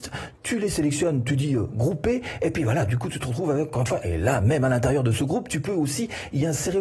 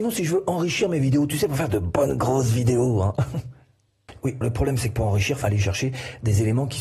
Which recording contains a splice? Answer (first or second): second